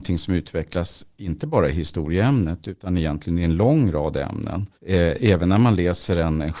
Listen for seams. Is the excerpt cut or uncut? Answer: cut